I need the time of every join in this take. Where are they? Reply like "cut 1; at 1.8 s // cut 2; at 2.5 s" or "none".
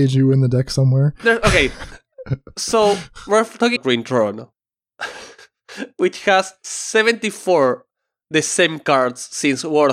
cut 1; at 3.8 s // cut 2; at 4.5 s